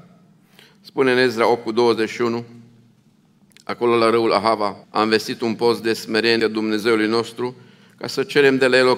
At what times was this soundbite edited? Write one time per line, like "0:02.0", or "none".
0:04.8
0:06.4